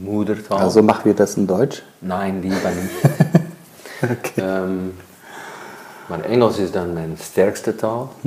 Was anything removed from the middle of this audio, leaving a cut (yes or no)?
no